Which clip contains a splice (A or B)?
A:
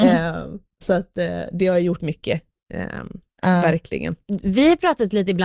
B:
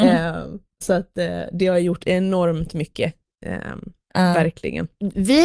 A